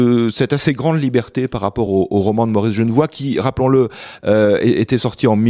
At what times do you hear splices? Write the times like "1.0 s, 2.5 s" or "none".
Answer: none